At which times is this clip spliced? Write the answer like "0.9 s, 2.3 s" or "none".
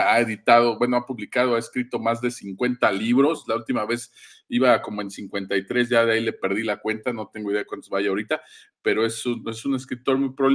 none